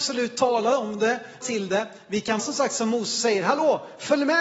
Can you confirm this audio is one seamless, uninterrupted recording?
no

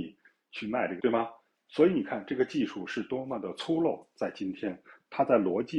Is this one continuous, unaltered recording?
no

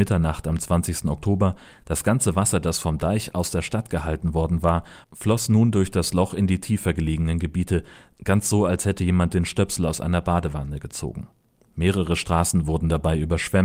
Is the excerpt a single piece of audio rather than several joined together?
yes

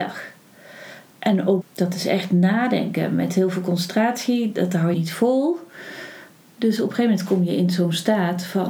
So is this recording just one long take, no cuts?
no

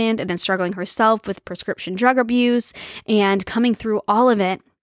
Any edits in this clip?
no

